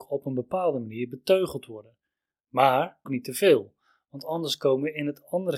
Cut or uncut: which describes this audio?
cut